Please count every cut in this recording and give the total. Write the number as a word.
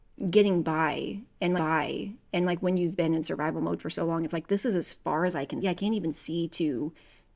two